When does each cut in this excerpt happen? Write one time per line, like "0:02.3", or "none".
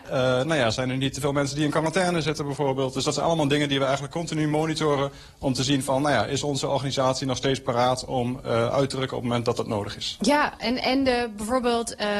none